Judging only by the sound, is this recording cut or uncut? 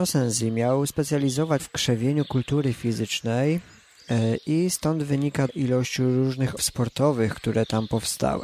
cut